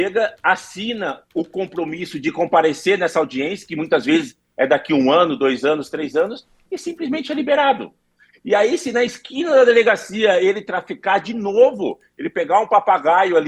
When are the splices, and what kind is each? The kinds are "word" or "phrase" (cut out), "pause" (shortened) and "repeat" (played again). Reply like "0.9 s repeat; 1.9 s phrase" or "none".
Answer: none